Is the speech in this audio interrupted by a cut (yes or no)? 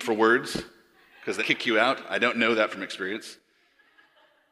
yes